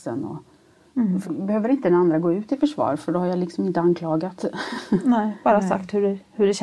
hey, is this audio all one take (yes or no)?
no